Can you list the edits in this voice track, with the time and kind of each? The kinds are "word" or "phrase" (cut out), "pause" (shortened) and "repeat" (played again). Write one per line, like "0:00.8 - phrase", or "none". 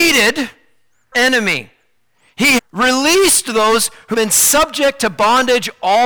0:01.1 - word
0:02.6 - word
0:04.1 - word